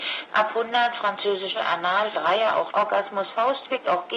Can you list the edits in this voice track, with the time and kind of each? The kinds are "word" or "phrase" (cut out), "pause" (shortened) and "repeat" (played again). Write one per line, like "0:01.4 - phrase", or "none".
0:01.5 - word
0:02.1 - word
0:02.7 - word